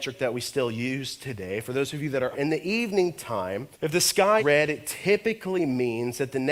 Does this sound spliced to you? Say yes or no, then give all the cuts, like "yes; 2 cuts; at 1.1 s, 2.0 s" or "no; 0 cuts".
yes; 3 cuts; at 2.3 s, 3.7 s, 4.4 s